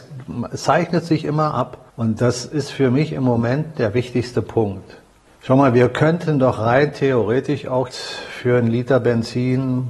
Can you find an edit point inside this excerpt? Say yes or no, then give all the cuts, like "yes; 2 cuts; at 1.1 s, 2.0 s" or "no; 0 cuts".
yes; 3 cuts; at 1.9 s, 5.3 s, 7.9 s